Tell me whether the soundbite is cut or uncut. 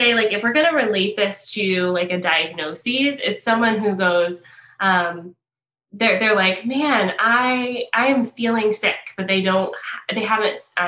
uncut